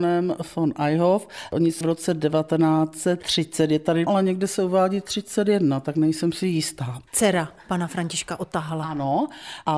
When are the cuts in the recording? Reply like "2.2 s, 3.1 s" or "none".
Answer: 1.8 s, 4.1 s, 7.1 s

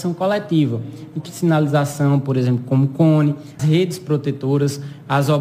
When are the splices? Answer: 1.3 s, 3.6 s

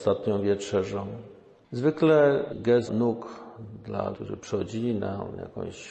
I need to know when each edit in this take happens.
2.5 s, 2.9 s, 4.1 s

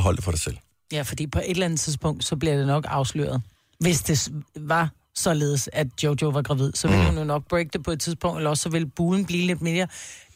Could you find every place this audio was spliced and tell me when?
none

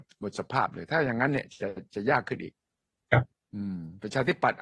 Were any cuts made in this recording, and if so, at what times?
3.3 s

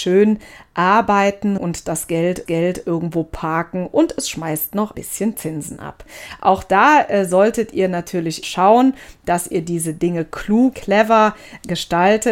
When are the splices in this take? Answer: 1.6 s, 2.5 s, 4.9 s, 8.4 s, 10.7 s

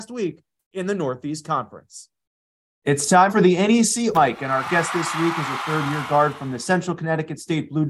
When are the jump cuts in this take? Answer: 3.3 s, 4.1 s

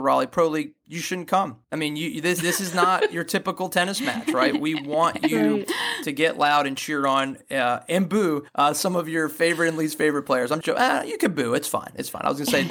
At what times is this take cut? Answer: 1.6 s, 8.5 s, 10.6 s

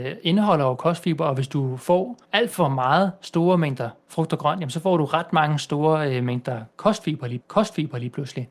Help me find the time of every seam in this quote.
2.2 s, 4.0 s, 7.4 s

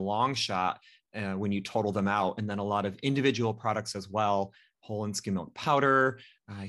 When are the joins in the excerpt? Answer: none

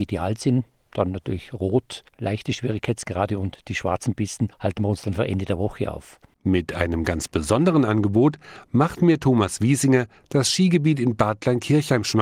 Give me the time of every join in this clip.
2.1 s, 4.5 s

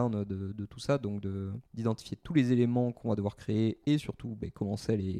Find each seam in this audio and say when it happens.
1.7 s

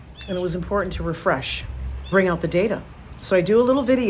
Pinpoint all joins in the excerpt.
2.1 s

